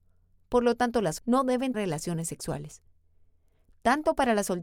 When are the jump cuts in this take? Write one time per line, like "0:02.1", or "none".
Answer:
0:01.2
0:01.7